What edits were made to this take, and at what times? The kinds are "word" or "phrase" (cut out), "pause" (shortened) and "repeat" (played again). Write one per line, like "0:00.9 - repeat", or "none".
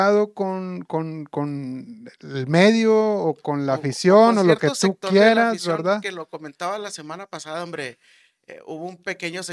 none